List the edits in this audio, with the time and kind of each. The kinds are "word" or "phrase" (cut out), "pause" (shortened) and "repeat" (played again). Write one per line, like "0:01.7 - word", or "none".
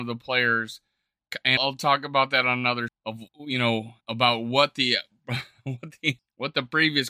0:01.6 - word
0:02.9 - word
0:03.3 - pause
0:04.0 - pause
0:06.2 - word